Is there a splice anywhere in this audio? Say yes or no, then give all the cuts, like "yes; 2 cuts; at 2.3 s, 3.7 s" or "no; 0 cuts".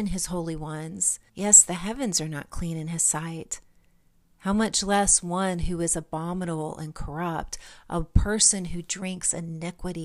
yes; 1 cut; at 1.3 s